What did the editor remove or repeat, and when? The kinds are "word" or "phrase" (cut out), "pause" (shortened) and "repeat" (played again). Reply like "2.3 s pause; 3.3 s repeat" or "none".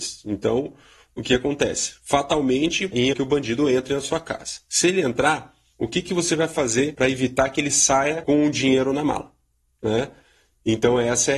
3.1 s phrase